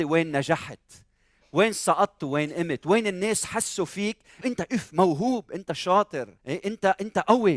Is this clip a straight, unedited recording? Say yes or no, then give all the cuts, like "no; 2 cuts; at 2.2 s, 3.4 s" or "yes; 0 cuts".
no; 2 cuts; at 4.4 s, 6.4 s